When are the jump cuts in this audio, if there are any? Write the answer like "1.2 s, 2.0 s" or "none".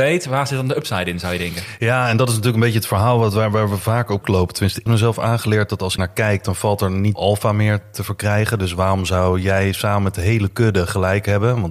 4.2 s, 4.9 s, 6.0 s, 7.2 s